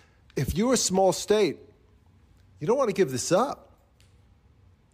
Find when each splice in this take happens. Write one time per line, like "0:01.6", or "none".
none